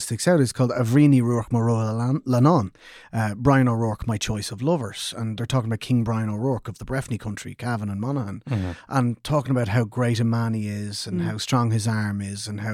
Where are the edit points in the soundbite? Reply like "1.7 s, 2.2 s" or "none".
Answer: none